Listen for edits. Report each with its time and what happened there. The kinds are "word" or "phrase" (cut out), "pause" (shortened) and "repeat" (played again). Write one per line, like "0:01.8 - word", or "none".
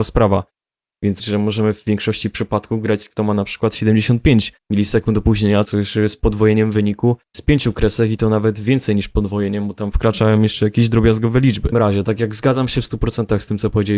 0:01.2 - phrase
0:03.1 - word
0:04.6 - pause
0:07.3 - pause
0:09.9 - word
0:11.7 - word